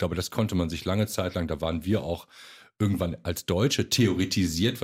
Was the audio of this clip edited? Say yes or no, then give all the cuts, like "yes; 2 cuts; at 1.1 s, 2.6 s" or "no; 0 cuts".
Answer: no; 0 cuts